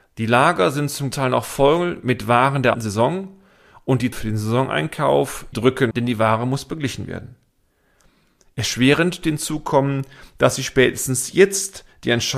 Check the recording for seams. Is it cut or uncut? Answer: cut